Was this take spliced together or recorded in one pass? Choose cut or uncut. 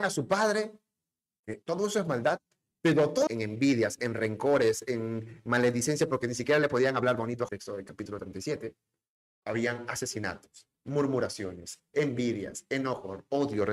cut